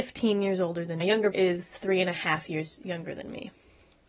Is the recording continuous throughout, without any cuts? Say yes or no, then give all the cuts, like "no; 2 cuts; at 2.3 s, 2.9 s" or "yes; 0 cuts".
no; 2 cuts; at 1.0 s, 1.3 s